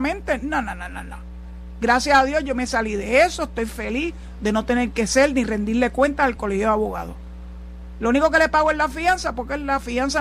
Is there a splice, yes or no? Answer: no